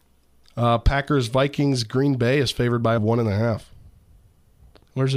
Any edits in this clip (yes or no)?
yes